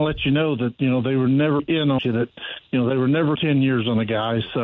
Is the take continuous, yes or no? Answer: no